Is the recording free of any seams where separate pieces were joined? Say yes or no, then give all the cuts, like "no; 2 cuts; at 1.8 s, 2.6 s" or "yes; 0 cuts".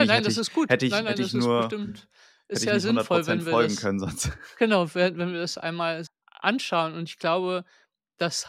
no; 1 cut; at 6.1 s